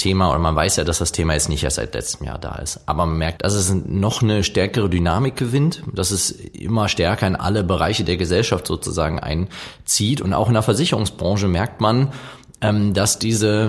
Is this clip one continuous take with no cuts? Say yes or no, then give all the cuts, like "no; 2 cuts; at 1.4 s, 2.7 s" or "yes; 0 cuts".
no; 1 cut; at 3.4 s